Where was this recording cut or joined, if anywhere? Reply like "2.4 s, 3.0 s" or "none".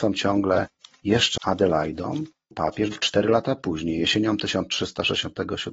1.4 s, 2.5 s, 2.9 s